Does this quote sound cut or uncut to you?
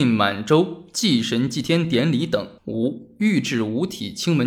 cut